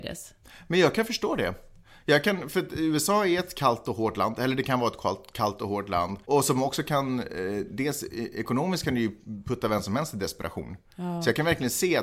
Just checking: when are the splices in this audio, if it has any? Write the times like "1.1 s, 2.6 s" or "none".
6.2 s